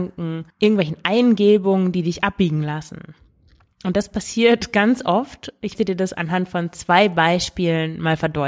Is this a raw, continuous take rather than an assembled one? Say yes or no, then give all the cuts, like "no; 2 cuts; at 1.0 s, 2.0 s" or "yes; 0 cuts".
no; 1 cut; at 5.7 s